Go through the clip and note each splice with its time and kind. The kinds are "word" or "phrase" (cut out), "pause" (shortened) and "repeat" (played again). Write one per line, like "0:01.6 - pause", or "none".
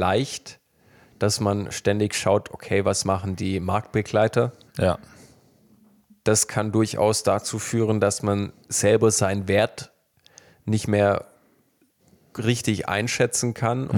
none